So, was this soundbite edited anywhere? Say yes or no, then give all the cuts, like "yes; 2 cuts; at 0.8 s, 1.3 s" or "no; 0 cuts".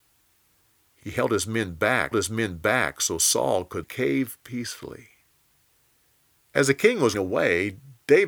yes; 4 cuts; at 2.1 s, 3.8 s, 5.7 s, 7.1 s